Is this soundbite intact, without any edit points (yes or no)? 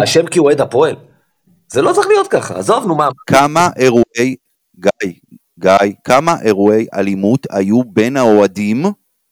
yes